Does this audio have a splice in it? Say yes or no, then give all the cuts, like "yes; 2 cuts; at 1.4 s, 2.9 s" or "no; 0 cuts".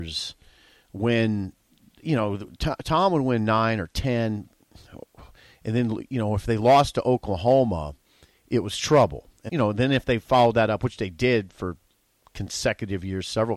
yes; 1 cut; at 9.5 s